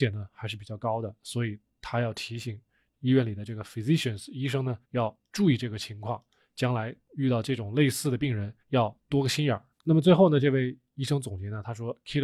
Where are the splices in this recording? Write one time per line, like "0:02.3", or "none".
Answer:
0:04.8
0:08.6
0:09.7